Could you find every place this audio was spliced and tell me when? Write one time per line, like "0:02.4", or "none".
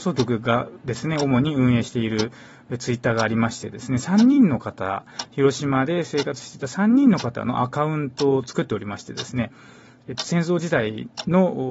none